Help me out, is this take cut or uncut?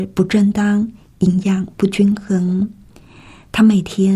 uncut